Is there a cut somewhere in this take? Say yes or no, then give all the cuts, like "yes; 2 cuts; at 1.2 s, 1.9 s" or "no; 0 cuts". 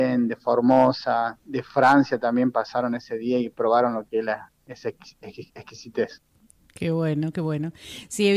no; 0 cuts